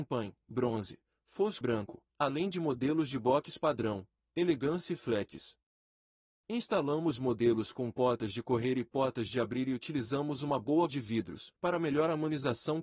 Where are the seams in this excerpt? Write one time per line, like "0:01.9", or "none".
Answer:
0:01.6
0:02.1
0:10.9
0:11.6